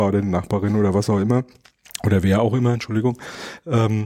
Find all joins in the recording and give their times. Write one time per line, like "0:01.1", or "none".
none